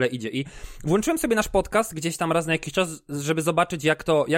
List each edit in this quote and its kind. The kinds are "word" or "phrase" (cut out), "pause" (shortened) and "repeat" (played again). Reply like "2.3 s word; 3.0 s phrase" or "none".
none